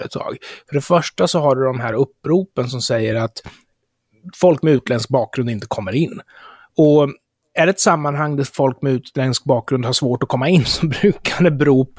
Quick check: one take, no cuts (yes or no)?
yes